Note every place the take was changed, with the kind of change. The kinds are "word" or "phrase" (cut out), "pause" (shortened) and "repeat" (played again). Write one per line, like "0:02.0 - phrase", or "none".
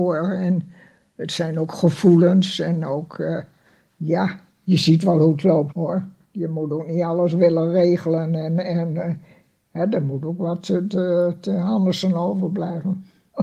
0:05.7 - word